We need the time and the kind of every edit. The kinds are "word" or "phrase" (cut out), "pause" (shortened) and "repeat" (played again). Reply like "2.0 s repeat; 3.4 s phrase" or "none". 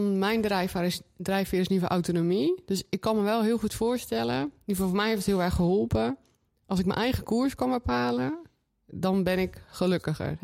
none